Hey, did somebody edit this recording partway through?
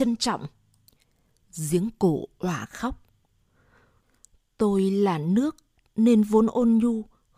no; 0 cuts

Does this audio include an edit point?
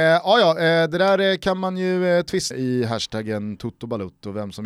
yes; 1 cut; at 2.5 s

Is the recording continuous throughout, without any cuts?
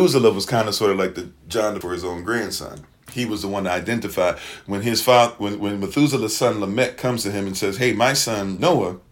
no; 1 cut; at 1.8 s

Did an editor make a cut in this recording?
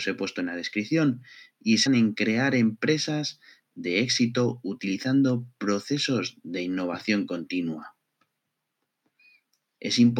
yes; 1 cut; at 1.9 s

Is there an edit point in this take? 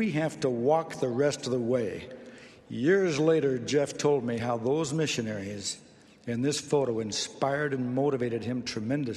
no; 0 cuts

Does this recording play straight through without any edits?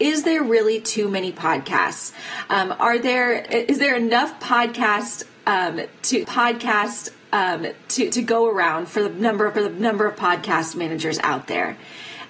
no; 3 cuts; at 3.5 s, 6.2 s, 9.6 s

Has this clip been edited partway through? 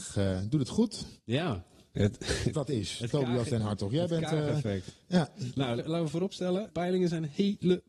yes; 3 cuts; at 2.5 s, 5.8 s, 6.7 s

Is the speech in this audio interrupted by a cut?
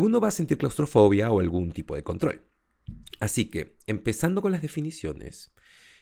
no; 0 cuts

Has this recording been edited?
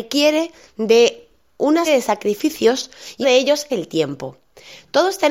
yes; 3 cuts; at 1.9 s, 3.2 s, 3.7 s

